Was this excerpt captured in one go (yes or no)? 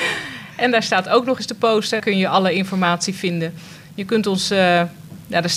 no